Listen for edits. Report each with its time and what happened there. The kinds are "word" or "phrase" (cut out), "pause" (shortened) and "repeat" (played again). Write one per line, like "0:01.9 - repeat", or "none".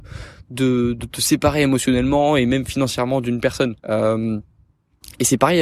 0:03.8 - pause